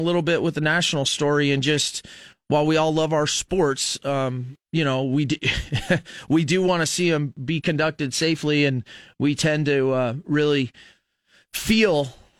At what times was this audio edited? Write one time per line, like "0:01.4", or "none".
none